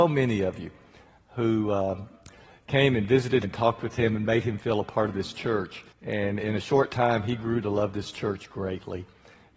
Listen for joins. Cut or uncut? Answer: cut